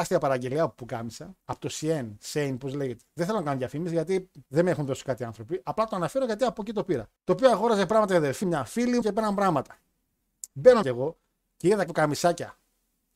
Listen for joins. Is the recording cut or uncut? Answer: cut